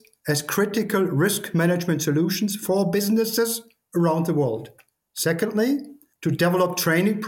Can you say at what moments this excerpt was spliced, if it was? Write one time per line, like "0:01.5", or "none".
none